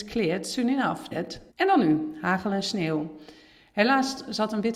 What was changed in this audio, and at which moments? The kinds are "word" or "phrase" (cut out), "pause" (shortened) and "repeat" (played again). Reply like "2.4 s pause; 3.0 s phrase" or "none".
1.1 s word; 1.5 s pause